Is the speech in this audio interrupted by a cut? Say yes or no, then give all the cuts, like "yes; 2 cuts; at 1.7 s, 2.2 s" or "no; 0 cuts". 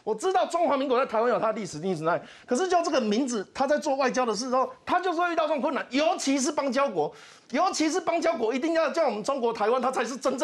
no; 0 cuts